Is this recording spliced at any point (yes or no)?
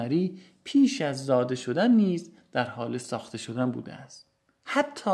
no